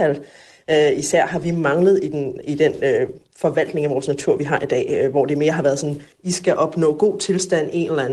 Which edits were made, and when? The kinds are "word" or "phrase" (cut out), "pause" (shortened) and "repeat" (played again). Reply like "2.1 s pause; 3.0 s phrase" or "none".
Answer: 6.1 s pause